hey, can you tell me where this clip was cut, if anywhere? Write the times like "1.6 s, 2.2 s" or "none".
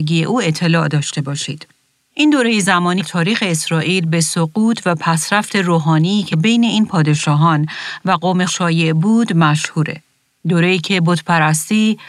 3.0 s, 6.3 s, 8.5 s